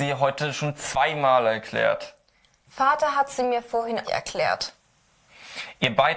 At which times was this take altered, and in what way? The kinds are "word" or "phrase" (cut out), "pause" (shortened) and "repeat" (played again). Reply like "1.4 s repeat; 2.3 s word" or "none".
4.0 s word